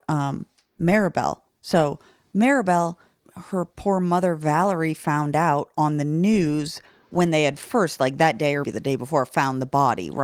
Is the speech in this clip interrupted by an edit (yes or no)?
yes